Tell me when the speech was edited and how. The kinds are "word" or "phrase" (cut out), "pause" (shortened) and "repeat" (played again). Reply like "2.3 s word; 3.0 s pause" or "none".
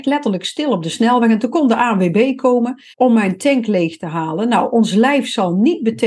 2.9 s pause